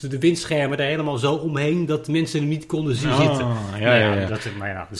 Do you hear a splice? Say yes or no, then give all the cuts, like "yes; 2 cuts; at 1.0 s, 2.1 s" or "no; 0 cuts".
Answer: no; 0 cuts